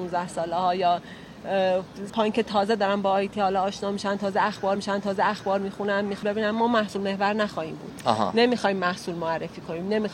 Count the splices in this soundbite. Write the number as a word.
three